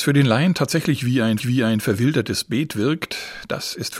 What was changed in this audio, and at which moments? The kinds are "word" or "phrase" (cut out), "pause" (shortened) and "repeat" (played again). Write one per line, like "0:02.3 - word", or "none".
0:01.4 - repeat